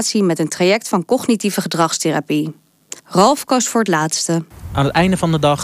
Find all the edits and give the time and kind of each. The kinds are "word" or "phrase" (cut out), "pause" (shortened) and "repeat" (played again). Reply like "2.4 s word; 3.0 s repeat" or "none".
3.0 s pause